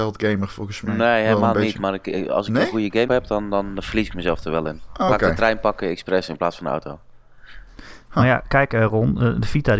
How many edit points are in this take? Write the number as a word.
two